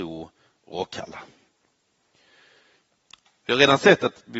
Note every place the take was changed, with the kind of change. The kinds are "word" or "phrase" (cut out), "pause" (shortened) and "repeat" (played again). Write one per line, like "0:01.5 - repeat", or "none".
none